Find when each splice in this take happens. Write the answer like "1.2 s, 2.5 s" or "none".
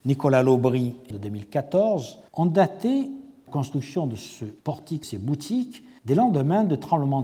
1.1 s, 2.3 s, 3.5 s, 4.6 s, 5.0 s, 6.0 s